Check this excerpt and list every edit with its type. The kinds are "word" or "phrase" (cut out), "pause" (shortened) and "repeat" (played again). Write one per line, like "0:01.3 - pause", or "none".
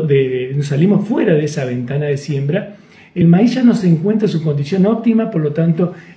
none